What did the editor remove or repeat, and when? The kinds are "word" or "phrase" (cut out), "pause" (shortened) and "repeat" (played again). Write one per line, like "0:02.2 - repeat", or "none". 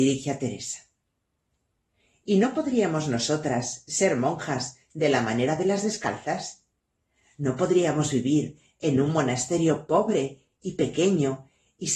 none